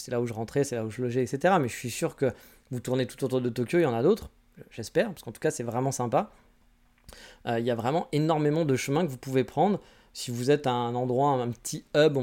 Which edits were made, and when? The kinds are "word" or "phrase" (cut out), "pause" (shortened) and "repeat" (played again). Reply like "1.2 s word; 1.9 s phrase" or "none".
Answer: none

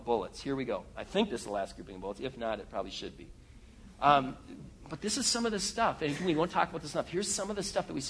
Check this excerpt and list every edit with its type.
none

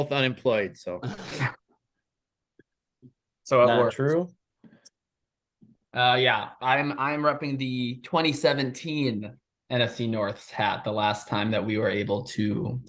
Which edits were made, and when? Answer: none

